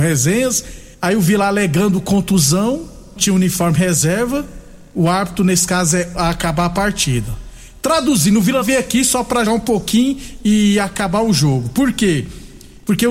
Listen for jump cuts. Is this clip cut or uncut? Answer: cut